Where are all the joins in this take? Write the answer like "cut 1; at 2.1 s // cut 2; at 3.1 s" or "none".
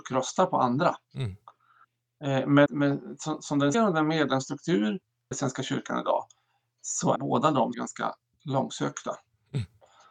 cut 1; at 2.7 s // cut 2; at 3.7 s // cut 3; at 5.3 s // cut 4; at 7.2 s // cut 5; at 7.7 s